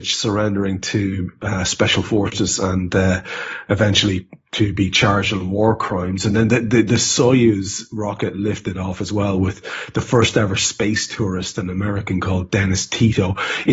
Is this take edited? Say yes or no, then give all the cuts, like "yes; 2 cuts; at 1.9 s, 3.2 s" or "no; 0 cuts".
no; 0 cuts